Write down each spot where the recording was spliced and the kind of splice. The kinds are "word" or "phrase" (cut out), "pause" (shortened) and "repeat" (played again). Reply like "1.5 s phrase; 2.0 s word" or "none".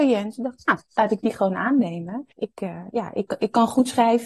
2.3 s pause